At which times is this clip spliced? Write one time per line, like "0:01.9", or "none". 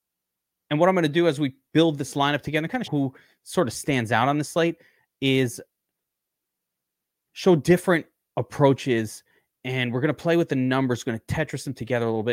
0:02.9